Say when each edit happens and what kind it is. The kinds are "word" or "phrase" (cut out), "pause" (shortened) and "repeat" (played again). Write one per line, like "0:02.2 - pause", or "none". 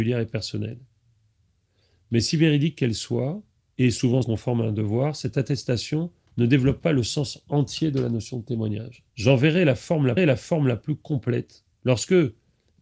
0:03.6 - pause
0:04.2 - word
0:06.3 - pause
0:09.1 - pause
0:10.2 - repeat
0:11.7 - pause